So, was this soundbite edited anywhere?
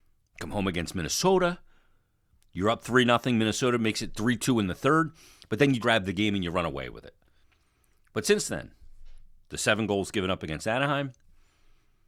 yes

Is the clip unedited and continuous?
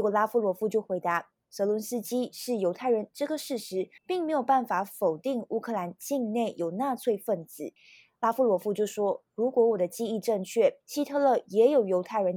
no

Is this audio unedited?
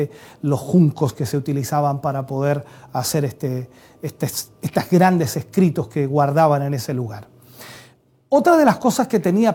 yes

